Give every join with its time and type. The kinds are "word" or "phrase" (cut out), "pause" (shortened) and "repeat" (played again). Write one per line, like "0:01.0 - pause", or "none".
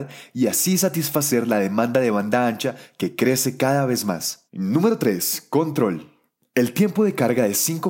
0:04.5 - pause